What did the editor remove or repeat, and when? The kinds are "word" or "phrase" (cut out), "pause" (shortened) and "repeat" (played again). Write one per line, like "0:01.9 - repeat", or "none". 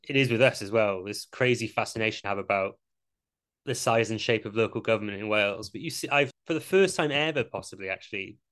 0:02.2 - word
0:06.3 - word